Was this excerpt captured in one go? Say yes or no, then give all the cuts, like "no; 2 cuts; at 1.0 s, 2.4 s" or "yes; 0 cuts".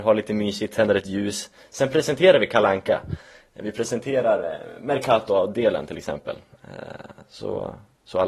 yes; 0 cuts